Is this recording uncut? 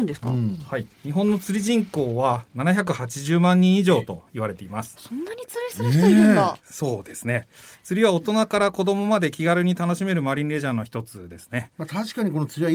no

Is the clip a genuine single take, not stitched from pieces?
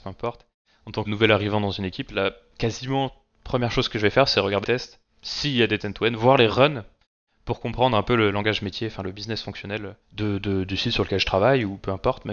no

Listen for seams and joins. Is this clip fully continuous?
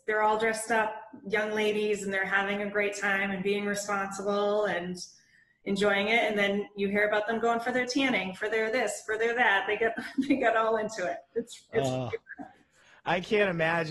yes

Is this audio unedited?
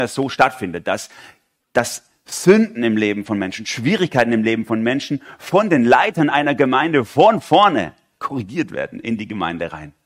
yes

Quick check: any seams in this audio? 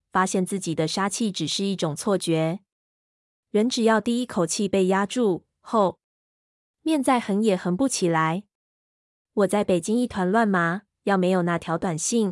no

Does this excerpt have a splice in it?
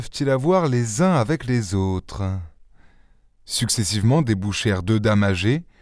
no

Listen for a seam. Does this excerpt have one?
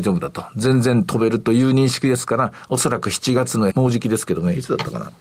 yes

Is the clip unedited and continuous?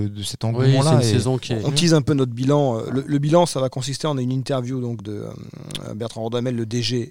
no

